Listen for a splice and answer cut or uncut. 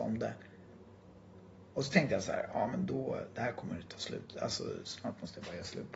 uncut